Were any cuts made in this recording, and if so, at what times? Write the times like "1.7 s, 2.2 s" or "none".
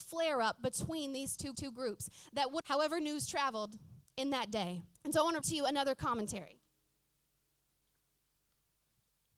1.5 s, 2.6 s, 4.9 s, 5.4 s